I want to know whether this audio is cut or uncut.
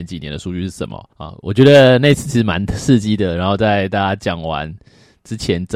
cut